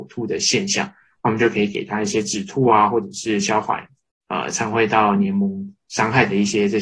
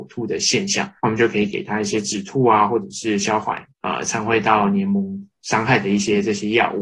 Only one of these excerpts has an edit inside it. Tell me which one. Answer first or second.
second